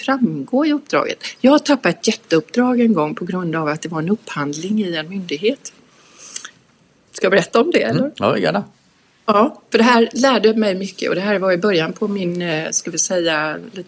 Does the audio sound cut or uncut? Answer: uncut